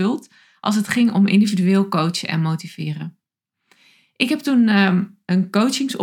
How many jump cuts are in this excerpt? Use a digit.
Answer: 0